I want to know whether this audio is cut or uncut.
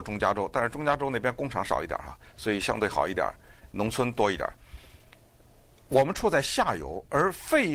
uncut